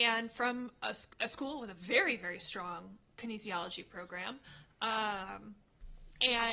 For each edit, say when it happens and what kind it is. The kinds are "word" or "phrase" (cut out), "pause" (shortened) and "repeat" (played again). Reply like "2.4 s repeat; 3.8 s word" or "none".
1.1 s pause